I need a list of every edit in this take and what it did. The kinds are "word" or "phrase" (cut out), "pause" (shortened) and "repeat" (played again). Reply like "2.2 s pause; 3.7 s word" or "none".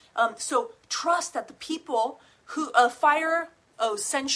none